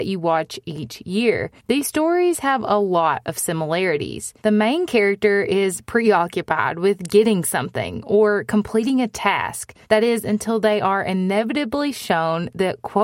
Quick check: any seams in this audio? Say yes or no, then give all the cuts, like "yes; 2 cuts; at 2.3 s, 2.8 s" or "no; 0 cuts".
yes; 3 cuts; at 1.6 s, 4.4 s, 9.8 s